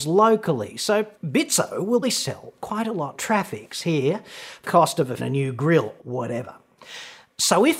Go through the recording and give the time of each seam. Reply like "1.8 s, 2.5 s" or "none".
1.1 s, 2.0 s, 3.1 s, 4.6 s, 5.2 s, 6.0 s

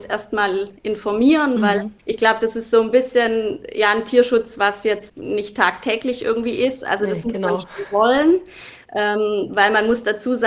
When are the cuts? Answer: 2.0 s, 5.1 s

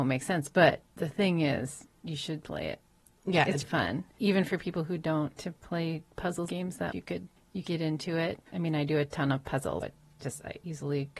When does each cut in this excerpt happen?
3.6 s, 4.1 s, 5.4 s, 6.5 s, 6.9 s, 7.6 s, 8.5 s, 9.8 s

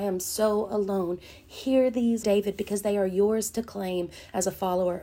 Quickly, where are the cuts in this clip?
2.2 s

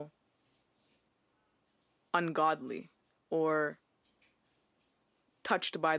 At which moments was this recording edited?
none

